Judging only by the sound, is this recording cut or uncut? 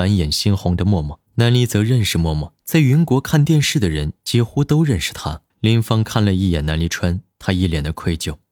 cut